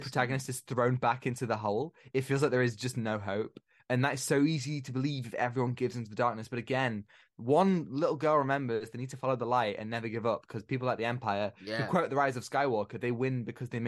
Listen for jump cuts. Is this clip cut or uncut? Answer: uncut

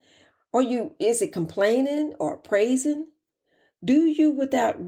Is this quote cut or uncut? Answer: uncut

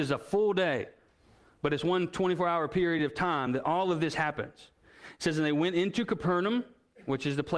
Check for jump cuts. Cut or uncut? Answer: uncut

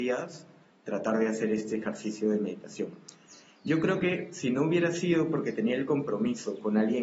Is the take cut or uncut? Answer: uncut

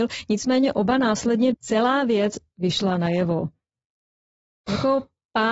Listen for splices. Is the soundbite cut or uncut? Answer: cut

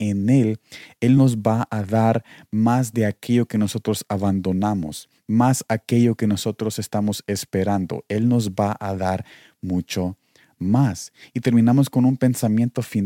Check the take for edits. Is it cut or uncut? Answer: uncut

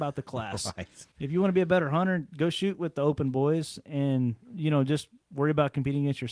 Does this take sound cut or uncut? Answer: cut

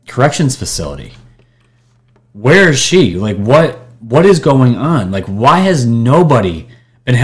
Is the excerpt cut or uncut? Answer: uncut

